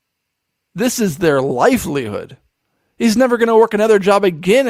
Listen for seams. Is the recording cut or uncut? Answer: uncut